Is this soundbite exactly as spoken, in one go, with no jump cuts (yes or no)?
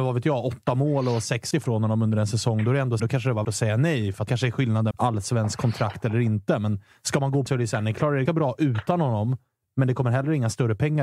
no